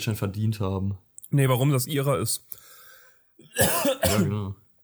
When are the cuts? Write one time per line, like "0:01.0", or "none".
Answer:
none